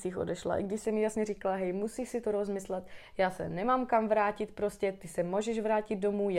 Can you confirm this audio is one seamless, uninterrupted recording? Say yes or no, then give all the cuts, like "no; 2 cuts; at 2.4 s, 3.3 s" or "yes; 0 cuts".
yes; 0 cuts